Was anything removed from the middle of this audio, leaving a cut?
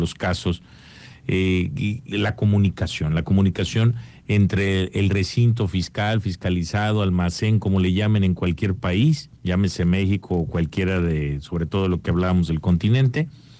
yes; 1 cut; at 9.4 s

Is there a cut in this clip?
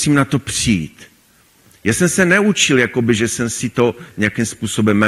no; 0 cuts

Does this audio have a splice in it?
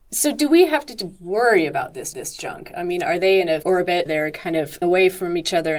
yes; 4 cuts; at 2.1 s, 3.6 s, 4.1 s, 4.8 s

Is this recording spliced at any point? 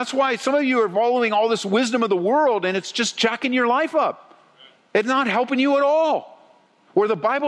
no; 0 cuts

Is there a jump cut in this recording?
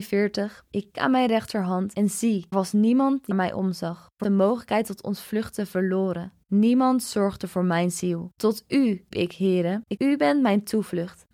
yes; 6 cuts; at 0.9 s, 2.5 s, 3.3 s, 4.2 s, 9.1 s, 10.0 s

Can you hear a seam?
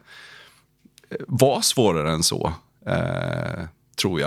no; 0 cuts

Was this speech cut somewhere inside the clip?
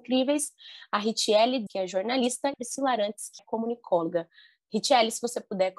yes; 3 cuts; at 1.7 s, 2.5 s, 3.4 s

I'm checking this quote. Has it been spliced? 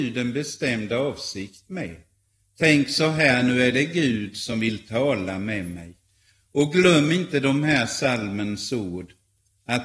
no; 0 cuts

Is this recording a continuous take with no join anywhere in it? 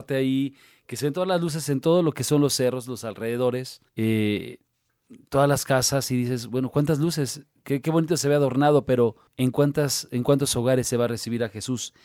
no; 2 cuts; at 3.9 s, 9.3 s

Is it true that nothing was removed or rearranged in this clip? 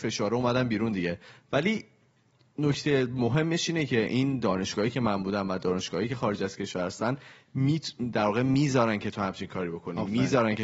yes; 0 cuts

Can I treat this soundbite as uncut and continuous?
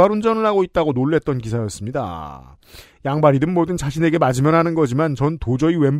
yes; 0 cuts

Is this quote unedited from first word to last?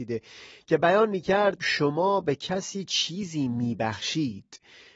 no; 1 cut; at 1.6 s

